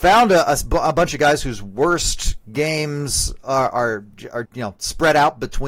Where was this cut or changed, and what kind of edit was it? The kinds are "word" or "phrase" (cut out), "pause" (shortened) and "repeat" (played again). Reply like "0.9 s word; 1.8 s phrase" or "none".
4.4 s word